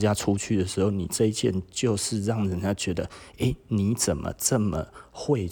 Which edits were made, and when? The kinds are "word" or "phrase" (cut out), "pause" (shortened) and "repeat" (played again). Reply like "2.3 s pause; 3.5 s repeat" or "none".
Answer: none